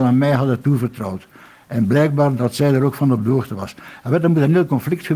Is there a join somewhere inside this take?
no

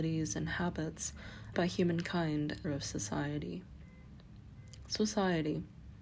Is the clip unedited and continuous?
no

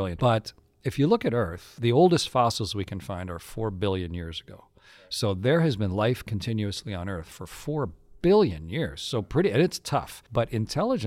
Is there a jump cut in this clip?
no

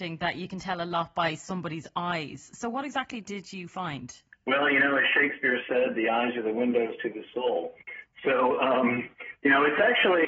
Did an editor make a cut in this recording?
no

